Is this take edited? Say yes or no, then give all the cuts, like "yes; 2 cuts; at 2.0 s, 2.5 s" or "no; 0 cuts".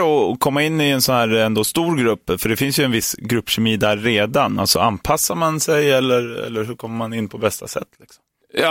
no; 0 cuts